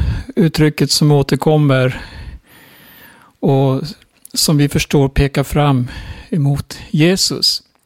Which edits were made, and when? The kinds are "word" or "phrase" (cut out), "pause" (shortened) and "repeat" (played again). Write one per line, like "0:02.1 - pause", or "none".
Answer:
none